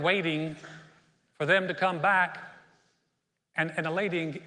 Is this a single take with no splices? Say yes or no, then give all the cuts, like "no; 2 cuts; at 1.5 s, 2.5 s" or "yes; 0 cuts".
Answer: yes; 0 cuts